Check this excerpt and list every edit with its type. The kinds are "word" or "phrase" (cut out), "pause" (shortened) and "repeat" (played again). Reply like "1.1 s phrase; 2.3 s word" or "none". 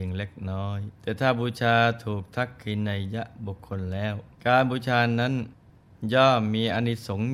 1.0 s pause; 4.3 s pause